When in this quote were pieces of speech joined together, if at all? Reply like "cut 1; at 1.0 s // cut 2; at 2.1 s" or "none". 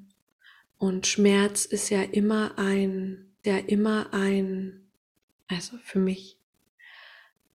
cut 1; at 3.4 s